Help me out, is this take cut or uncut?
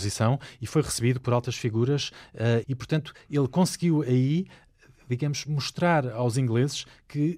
cut